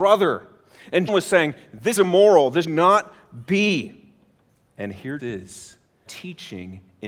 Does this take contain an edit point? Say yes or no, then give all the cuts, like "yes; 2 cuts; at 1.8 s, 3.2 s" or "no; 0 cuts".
yes; 6 cuts; at 1.1 s, 2.0 s, 2.6 s, 4.5 s, 5.2 s, 6.1 s